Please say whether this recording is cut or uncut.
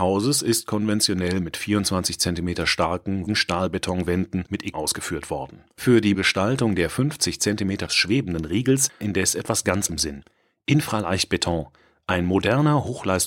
cut